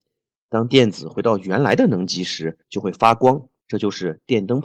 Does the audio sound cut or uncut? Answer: cut